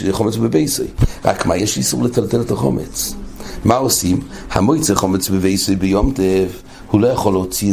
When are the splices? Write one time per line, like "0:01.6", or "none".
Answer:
none